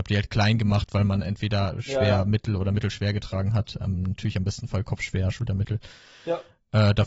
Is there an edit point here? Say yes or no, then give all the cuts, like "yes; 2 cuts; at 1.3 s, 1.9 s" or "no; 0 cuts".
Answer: no; 0 cuts